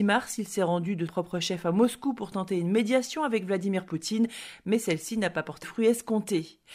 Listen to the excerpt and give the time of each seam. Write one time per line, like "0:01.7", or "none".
0:01.1
0:05.6